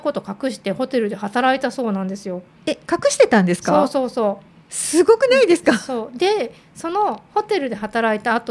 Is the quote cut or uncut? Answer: uncut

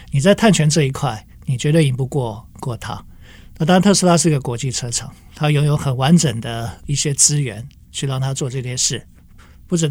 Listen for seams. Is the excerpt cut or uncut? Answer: uncut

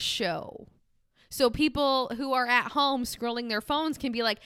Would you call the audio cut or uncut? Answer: uncut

